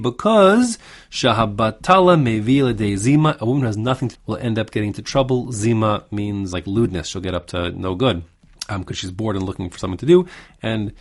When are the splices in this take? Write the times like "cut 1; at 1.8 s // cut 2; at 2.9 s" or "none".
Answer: cut 1; at 4.1 s // cut 2; at 6.5 s // cut 3; at 8.5 s